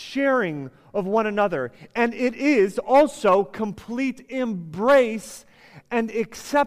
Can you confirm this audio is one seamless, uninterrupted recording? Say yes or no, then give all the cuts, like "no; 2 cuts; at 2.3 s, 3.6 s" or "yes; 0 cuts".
yes; 0 cuts